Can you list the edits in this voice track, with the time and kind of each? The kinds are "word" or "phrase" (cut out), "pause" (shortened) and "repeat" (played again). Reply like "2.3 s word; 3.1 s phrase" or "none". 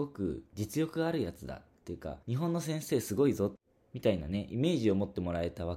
2.2 s pause